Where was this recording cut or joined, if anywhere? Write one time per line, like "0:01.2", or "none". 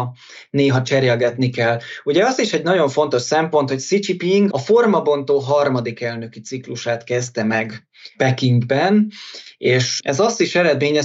none